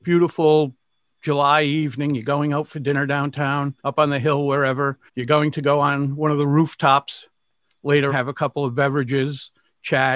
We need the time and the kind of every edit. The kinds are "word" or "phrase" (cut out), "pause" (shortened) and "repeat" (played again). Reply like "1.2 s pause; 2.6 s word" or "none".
3.8 s pause; 5.1 s pause; 8.1 s word